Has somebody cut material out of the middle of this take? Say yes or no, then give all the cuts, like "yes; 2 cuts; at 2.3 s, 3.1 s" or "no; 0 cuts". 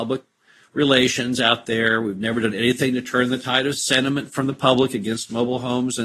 no; 0 cuts